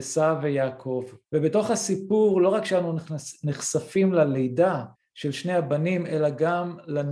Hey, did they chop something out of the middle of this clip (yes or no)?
yes